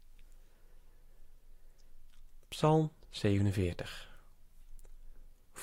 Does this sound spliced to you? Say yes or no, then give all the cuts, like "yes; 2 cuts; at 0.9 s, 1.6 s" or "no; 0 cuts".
yes; 1 cut; at 2.4 s